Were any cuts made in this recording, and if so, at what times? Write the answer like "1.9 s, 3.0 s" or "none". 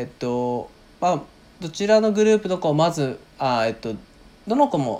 none